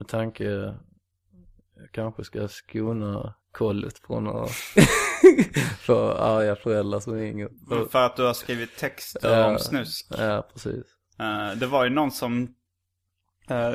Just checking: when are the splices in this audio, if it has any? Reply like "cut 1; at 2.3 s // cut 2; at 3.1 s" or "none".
cut 1; at 3.4 s // cut 2; at 7.6 s